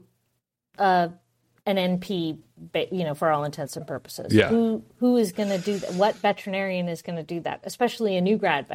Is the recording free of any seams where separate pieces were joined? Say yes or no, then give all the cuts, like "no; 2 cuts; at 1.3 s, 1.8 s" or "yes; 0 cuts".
yes; 0 cuts